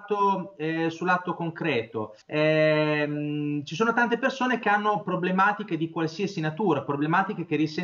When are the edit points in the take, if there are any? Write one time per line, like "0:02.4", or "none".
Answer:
0:02.2